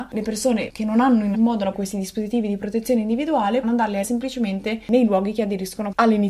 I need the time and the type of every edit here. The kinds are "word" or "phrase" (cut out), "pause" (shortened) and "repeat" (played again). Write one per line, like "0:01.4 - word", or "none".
0:01.3 - word
0:01.7 - phrase
0:03.6 - word
0:04.0 - word

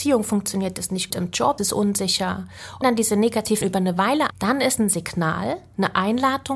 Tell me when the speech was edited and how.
0:01.1 - word
0:01.6 - word
0:02.8 - word
0:03.6 - word
0:04.3 - word
0:04.8 - word

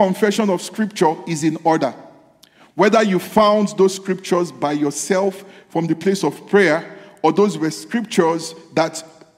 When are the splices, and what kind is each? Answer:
none

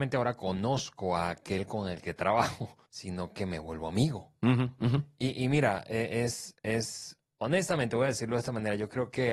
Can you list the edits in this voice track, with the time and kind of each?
0:02.9 - pause

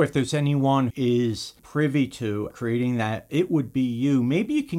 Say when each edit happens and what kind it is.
0:00.9 - word
0:01.6 - pause
0:02.5 - phrase
0:03.3 - word

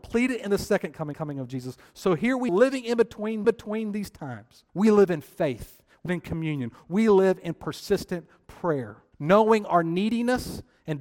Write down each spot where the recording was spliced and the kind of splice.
0:01.1 - repeat
0:02.5 - word
0:03.4 - repeat
0:04.7 - pause
0:06.1 - word
0:09.1 - pause

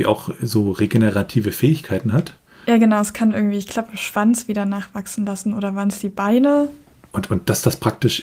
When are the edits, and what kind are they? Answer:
none

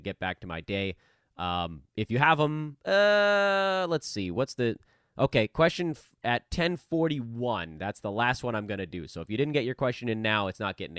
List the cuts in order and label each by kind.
none

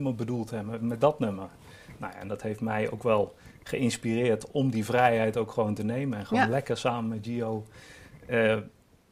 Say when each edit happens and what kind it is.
none

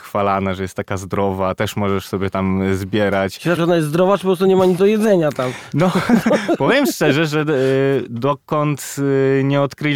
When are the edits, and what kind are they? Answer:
0:03.6 - word
0:04.8 - word

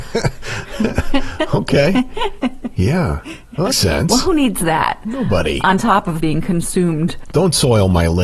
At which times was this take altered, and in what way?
0:03.7 - word
0:06.2 - phrase

